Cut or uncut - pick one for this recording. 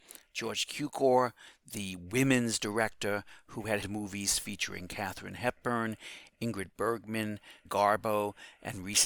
cut